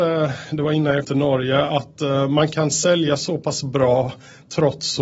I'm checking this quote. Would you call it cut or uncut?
cut